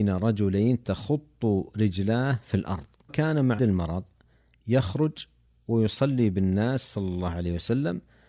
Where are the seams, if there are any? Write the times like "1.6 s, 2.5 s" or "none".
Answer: 3.1 s, 3.6 s